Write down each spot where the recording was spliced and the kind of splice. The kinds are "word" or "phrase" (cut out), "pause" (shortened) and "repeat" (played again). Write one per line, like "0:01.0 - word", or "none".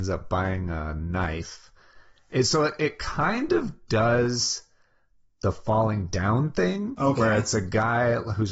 none